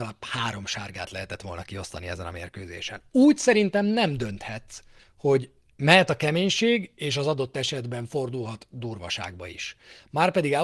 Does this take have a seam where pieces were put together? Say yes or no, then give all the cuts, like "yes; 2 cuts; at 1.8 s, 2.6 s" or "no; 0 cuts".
yes; 1 cut; at 5.0 s